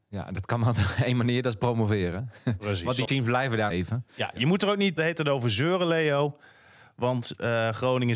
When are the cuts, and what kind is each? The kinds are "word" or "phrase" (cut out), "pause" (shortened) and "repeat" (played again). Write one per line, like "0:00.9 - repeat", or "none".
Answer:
0:03.1 - word
0:03.7 - phrase
0:05.0 - word